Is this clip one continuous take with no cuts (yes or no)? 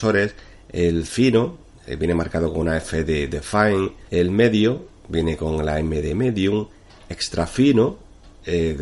no